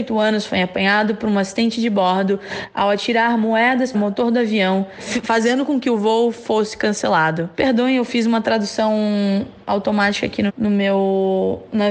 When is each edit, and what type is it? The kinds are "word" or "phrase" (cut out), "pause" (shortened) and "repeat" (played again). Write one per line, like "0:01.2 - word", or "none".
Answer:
0:03.9 - word
0:10.5 - word